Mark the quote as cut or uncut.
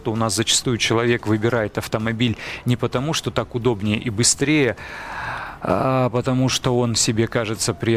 uncut